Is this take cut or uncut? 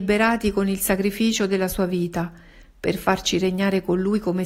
uncut